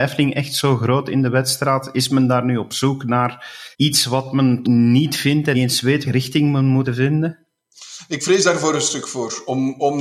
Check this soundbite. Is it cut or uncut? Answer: cut